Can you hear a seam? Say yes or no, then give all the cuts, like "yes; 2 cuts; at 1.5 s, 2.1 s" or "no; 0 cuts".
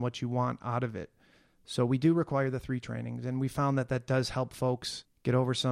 no; 0 cuts